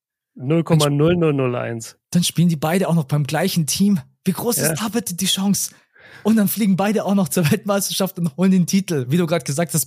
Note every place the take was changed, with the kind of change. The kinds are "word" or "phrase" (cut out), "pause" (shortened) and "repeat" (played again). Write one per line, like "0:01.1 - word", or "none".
none

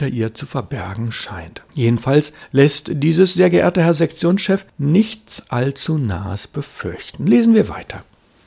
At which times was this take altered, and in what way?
0:01.7 - pause
0:04.7 - pause

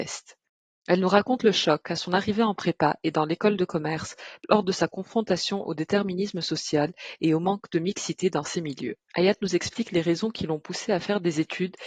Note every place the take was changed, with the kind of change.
0:09.0 - pause

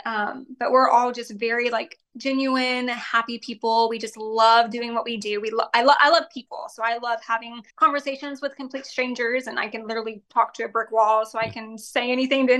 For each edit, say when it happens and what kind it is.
0:07.7 - pause

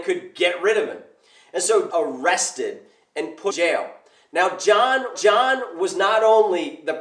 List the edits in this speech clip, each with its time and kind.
0:01.9 - phrase
0:03.5 - word
0:05.1 - repeat

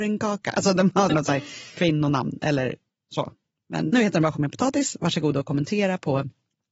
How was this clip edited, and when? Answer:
0:01.1 - word
0:03.9 - word
0:04.3 - word

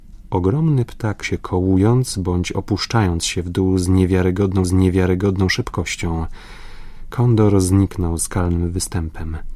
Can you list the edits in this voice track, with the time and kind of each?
0:01.2 - word
0:04.6 - repeat
0:08.2 - word

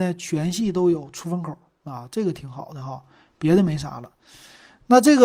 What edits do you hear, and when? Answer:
none

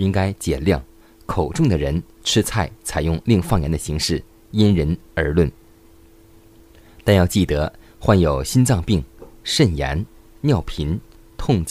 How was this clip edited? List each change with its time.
none

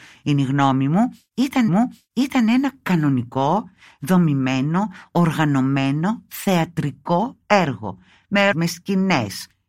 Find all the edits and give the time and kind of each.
0:01.7 - repeat
0:08.5 - word

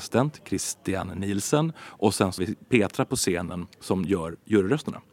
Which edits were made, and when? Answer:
0:02.4 - word
0:03.7 - pause

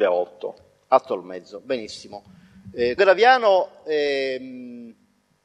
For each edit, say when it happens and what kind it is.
0:03.0 - word

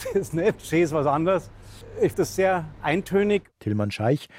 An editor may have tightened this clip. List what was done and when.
0:02.1 - word

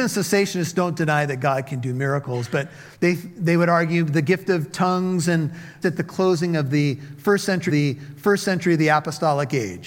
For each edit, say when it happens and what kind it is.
0:02.9 - pause
0:05.8 - phrase
0:07.7 - repeat

